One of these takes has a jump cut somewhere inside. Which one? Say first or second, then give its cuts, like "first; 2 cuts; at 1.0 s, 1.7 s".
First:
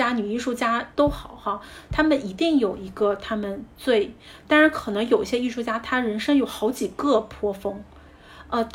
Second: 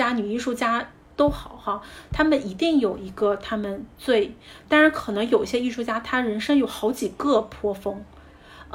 first; 1 cut; at 0.9 s